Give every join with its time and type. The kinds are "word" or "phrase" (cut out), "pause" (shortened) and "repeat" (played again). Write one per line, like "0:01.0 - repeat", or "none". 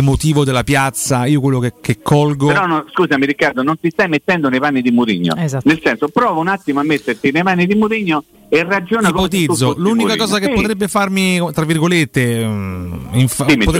none